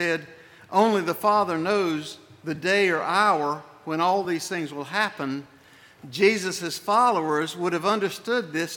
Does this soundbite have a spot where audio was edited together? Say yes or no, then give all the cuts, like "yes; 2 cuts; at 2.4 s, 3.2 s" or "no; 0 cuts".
no; 0 cuts